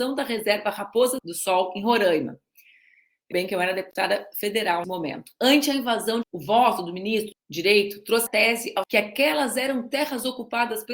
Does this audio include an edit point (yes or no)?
yes